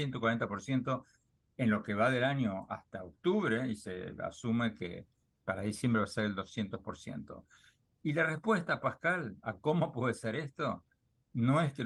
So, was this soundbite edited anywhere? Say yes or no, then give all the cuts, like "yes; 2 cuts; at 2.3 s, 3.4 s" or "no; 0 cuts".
no; 0 cuts